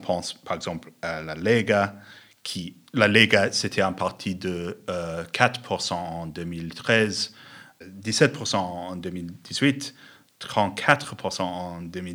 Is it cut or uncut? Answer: uncut